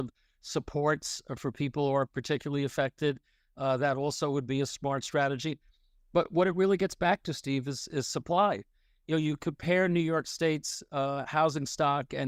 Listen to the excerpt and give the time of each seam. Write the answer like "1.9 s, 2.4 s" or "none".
none